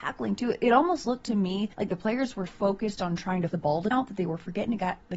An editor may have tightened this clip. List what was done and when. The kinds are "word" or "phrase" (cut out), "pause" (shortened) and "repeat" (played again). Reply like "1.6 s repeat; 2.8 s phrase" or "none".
1.7 s pause; 2.5 s word; 3.5 s word; 3.9 s word

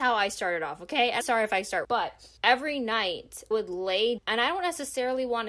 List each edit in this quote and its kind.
1.2 s word; 1.8 s phrase; 2.4 s pause; 3.5 s word; 4.2 s word

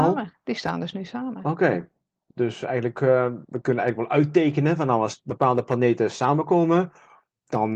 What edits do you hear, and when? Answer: none

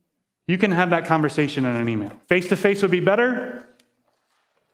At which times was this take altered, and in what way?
2.2 s pause

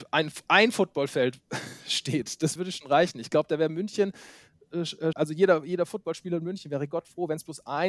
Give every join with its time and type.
2.6 s word; 5.1 s word

